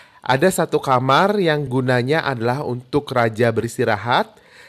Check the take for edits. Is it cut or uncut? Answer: uncut